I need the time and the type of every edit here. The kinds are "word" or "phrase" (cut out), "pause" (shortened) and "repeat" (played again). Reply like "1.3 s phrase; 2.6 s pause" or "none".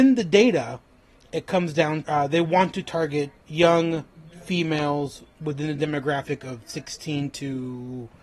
2.0 s phrase; 3.4 s pause